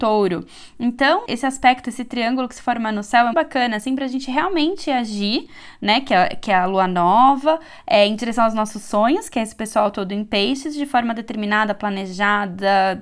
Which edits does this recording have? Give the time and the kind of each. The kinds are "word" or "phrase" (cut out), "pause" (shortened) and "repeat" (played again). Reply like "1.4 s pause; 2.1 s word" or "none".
1.3 s word; 3.3 s word

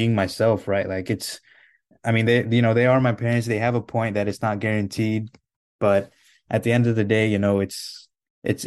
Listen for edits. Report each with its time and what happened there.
none

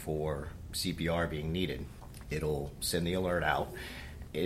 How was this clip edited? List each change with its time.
none

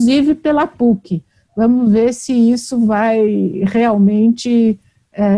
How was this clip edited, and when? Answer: none

